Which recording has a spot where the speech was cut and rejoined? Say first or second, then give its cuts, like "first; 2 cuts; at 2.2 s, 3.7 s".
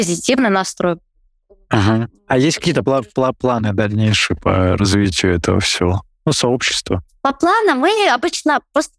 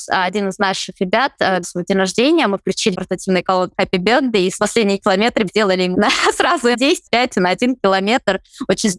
second; 8 cuts; at 1.6 s, 2.9 s, 3.8 s, 4.6 s, 5.5 s, 5.9 s, 6.7 s, 7.1 s